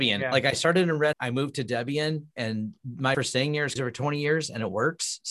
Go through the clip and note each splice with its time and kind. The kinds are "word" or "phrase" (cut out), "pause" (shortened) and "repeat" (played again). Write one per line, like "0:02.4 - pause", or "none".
0:01.1 - word
0:03.1 - word
0:03.8 - phrase